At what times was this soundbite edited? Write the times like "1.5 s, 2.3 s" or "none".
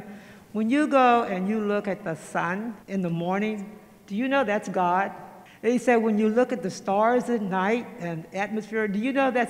2.8 s, 5.5 s